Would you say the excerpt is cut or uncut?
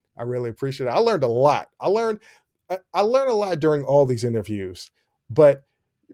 uncut